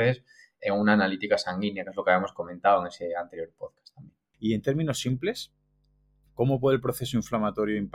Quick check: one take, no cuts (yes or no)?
yes